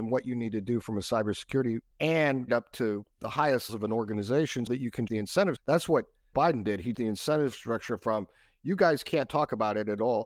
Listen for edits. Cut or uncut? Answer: cut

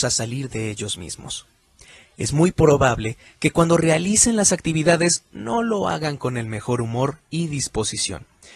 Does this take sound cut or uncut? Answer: uncut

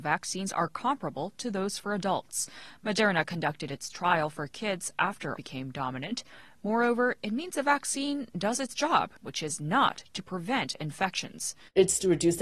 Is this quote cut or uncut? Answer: cut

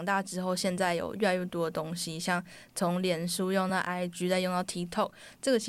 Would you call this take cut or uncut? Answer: uncut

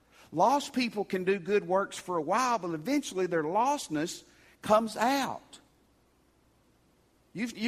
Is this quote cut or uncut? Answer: uncut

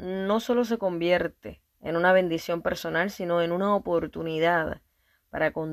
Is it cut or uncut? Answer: cut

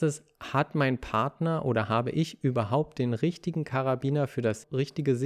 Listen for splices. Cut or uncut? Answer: uncut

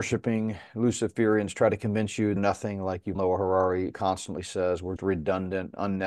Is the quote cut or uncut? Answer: cut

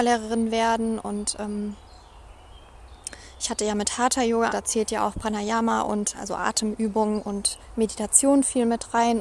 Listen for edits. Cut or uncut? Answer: cut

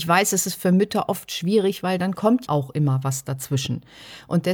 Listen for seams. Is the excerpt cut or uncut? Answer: cut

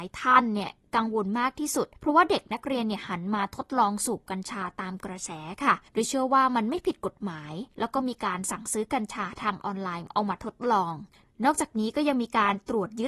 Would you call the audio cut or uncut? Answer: cut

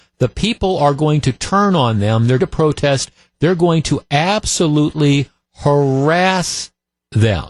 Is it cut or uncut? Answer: cut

